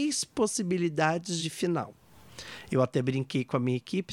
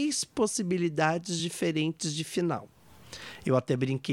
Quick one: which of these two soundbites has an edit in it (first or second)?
first